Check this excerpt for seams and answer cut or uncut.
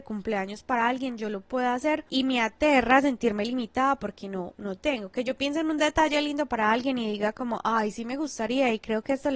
uncut